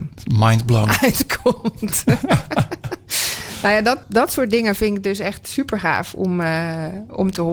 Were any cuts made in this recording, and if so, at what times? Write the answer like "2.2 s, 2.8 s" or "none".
4.0 s